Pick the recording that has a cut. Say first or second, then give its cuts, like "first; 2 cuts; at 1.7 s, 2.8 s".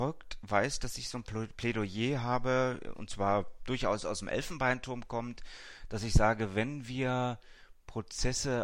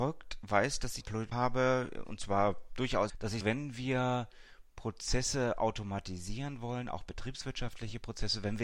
second; 4 cuts; at 1.0 s, 1.3 s, 3.1 s, 3.4 s